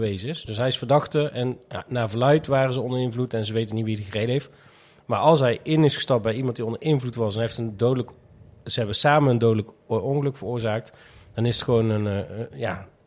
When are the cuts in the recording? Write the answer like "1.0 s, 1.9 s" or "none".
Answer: none